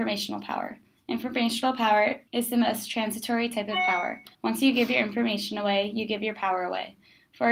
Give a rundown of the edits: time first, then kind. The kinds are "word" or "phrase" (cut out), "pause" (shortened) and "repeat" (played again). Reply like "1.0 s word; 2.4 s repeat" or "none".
2.3 s pause; 4.3 s pause